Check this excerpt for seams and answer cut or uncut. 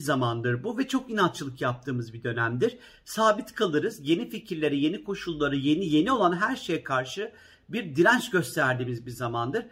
uncut